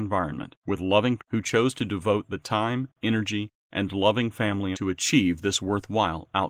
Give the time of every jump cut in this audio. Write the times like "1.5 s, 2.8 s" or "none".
1.2 s, 2.9 s, 4.7 s